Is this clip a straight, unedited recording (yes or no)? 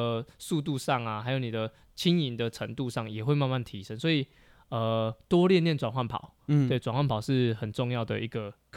yes